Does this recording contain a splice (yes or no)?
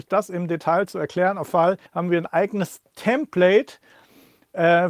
yes